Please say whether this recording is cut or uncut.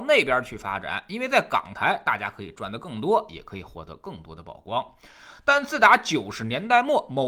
uncut